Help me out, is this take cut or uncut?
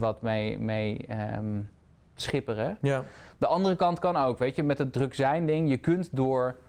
uncut